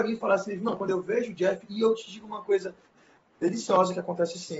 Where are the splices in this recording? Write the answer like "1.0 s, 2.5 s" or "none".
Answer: none